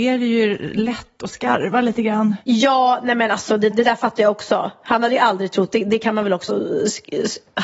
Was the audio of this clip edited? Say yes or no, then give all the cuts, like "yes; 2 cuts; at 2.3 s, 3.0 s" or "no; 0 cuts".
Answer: yes; 2 cuts; at 3.7 s, 6.5 s